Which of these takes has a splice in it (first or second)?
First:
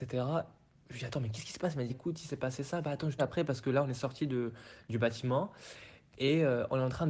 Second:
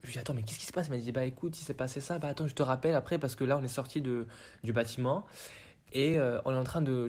first